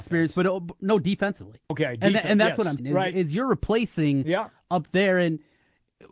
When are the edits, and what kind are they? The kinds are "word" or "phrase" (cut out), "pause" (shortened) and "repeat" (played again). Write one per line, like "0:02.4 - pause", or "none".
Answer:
0:01.6 - pause
0:02.8 - word